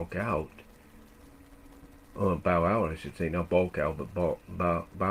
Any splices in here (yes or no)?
no